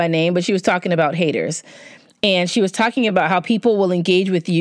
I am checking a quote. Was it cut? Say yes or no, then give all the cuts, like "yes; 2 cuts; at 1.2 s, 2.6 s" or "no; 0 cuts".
no; 0 cuts